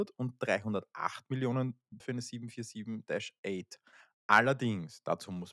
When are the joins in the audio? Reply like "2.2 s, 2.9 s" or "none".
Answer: 2.0 s

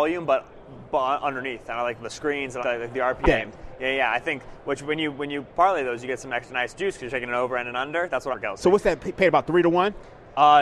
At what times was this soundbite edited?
2.6 s, 3.2 s, 8.3 s

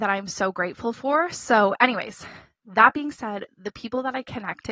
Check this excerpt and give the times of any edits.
none

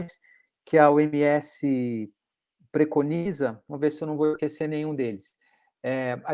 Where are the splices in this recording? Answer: none

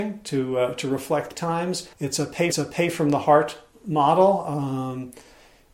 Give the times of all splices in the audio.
1.3 s, 1.9 s, 2.5 s

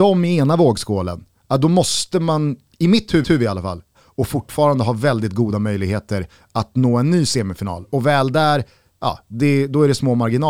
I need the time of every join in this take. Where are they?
3.2 s, 3.9 s

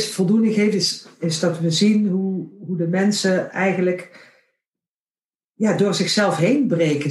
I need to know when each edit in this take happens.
none

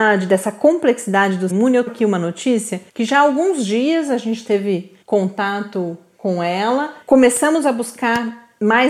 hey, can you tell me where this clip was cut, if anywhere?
1.5 s, 1.9 s, 2.9 s, 5.0 s, 7.0 s

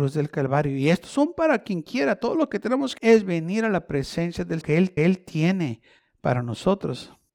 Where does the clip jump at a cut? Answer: 3.0 s, 4.6 s, 5.0 s

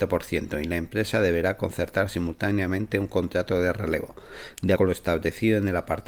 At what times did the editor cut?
4.8 s

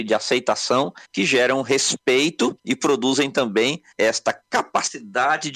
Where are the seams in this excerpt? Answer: 1.0 s, 2.6 s, 3.9 s

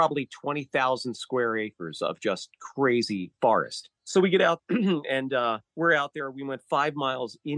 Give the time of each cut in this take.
4.0 s, 4.6 s, 5.7 s

